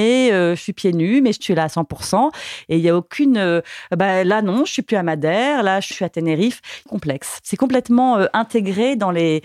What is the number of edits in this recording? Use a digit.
3